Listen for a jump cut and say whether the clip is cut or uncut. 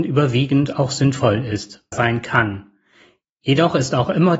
cut